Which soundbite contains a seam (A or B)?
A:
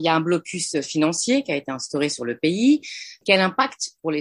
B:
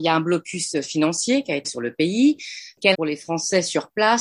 B